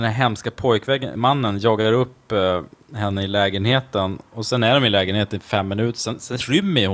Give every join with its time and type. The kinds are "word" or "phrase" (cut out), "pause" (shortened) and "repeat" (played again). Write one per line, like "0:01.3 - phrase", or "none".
none

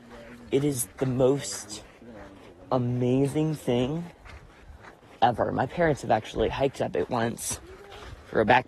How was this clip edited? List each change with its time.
none

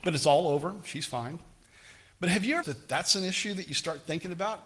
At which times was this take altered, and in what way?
0:02.6 - word

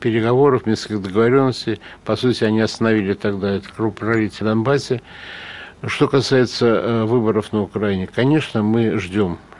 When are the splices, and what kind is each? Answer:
0:04.4 - word

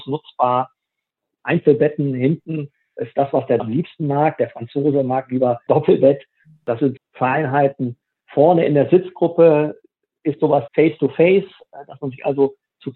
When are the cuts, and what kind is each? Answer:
0:03.6 - word
0:05.7 - word
0:07.0 - word
0:10.7 - word

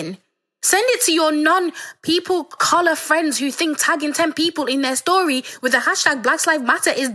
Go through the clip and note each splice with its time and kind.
0:02.6 - word

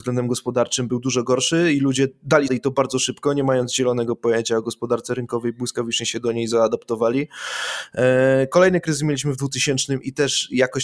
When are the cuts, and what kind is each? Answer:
0:02.5 - phrase

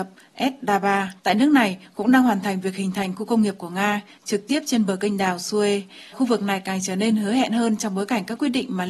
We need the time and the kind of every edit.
0:01.2 - pause
0:06.1 - word

